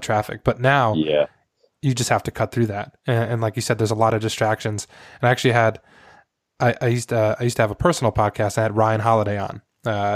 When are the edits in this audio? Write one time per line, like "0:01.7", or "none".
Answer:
none